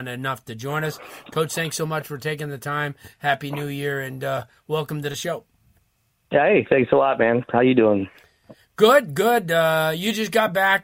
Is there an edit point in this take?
no; 0 cuts

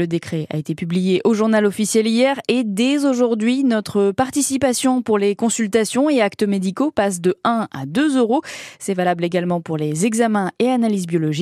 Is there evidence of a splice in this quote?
no; 0 cuts

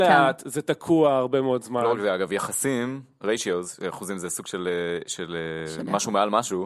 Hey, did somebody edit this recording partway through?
no; 0 cuts

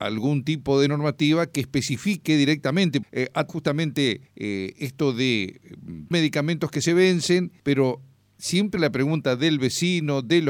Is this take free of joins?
no; 6 cuts; at 3.0 s, 3.5 s, 4.3 s, 6.1 s, 7.6 s, 8.8 s

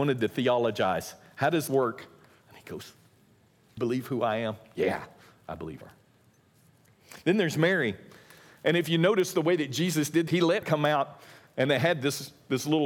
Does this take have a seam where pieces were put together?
yes; 5 cuts; at 1.7 s, 3.8 s, 5.8 s, 10.3 s, 10.6 s

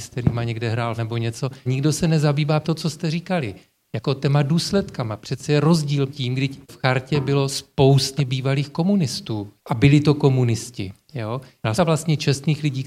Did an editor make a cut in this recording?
yes; 7 cuts; at 1.0 s, 1.7 s, 2.6 s, 6.1 s, 6.6 s, 8.2 s, 11.8 s

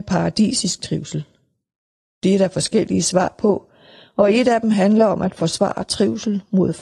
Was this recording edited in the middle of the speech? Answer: no; 0 cuts

